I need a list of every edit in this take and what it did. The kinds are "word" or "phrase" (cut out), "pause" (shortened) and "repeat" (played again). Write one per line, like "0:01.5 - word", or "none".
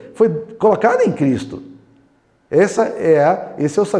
none